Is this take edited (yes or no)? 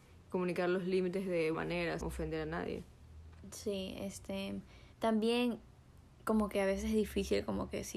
yes